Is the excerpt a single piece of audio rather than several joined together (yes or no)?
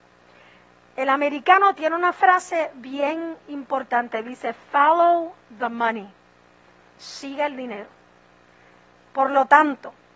yes